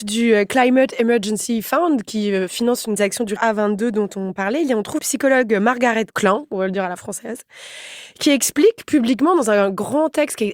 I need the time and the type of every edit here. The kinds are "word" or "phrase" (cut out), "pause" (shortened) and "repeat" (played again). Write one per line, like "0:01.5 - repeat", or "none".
0:03.0 - phrase
0:03.4 - word
0:05.0 - word
0:06.1 - word